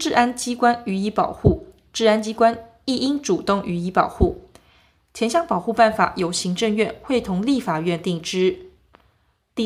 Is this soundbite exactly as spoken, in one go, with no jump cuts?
yes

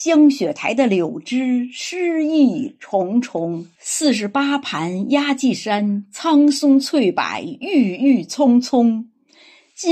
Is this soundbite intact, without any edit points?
no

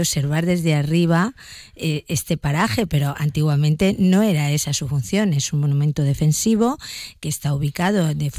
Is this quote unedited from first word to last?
yes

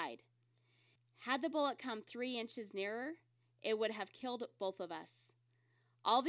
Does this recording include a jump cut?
no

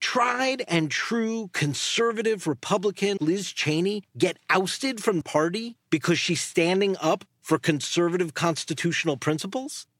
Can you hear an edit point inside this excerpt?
yes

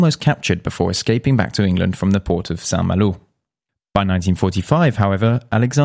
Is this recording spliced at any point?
no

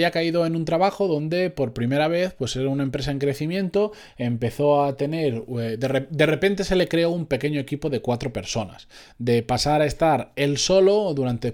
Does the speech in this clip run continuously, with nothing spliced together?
yes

